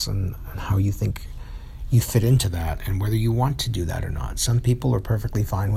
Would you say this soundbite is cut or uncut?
uncut